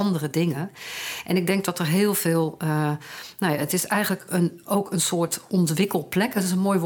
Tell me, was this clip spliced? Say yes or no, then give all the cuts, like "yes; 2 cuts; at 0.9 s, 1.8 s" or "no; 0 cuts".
no; 0 cuts